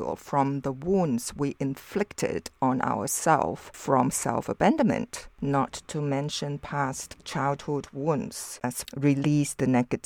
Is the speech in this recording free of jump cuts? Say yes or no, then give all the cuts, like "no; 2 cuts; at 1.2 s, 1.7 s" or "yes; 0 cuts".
no; 1 cut; at 8.8 s